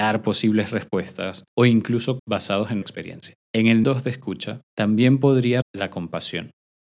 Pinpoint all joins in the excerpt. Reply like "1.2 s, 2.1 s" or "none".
1.5 s, 2.2 s, 2.8 s, 3.4 s, 3.8 s, 4.7 s, 5.6 s